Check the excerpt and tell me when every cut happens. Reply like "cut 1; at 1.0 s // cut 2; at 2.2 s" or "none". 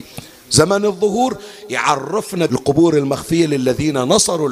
cut 1; at 2.5 s